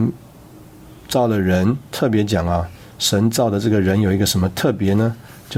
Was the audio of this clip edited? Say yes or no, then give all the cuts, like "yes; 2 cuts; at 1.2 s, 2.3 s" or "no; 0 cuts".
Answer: yes; 1 cut; at 1.0 s